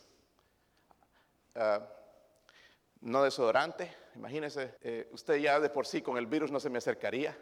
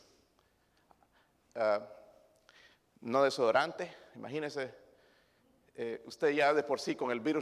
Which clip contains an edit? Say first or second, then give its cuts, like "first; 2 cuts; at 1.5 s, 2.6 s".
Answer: first; 1 cut; at 4.8 s